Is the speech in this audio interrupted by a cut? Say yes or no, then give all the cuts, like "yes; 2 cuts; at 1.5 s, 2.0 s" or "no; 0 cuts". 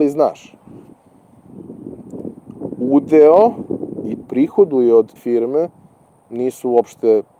yes; 2 cuts; at 4.2 s, 5.2 s